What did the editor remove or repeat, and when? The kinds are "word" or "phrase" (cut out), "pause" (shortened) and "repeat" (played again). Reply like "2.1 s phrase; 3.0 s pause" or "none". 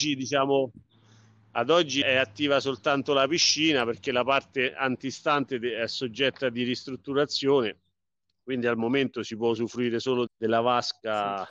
2.0 s word; 10.3 s word

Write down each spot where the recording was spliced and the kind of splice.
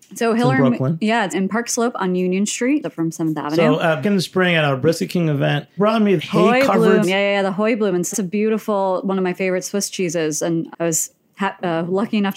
1.3 s word; 2.8 s word; 4.0 s word; 5.8 s word; 6.2 s word; 7.0 s word; 8.1 s word; 10.7 s word

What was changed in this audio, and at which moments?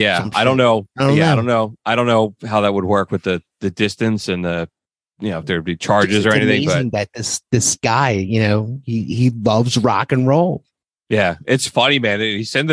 none

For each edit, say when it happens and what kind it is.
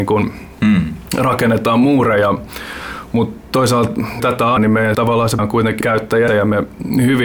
4.2 s word; 4.6 s word; 4.9 s word; 5.4 s word; 5.8 s word; 6.3 s word

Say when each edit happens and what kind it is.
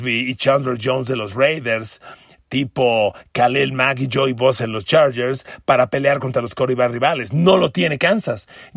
none

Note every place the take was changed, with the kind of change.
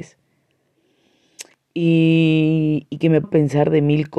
3.2 s word

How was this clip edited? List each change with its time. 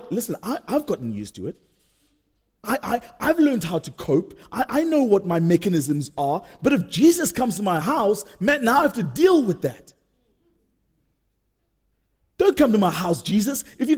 none

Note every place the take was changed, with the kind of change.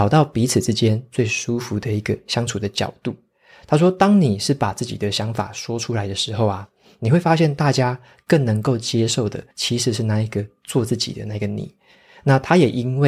9.5 s pause

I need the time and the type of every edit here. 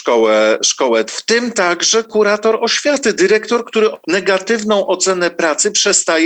1.1 s word; 4.0 s word

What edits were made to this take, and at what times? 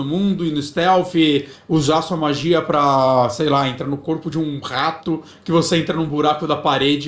none

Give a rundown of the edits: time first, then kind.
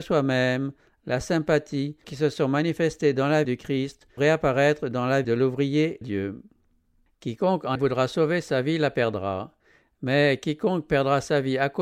2.0 s word; 3.4 s word; 4.2 s word; 5.2 s word; 6.0 s word; 7.8 s word

